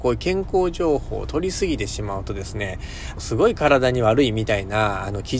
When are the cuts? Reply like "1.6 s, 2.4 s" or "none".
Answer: 3.2 s